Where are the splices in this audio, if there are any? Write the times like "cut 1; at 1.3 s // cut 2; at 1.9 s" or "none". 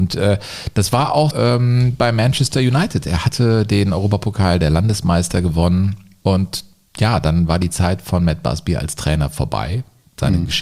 cut 1; at 1.3 s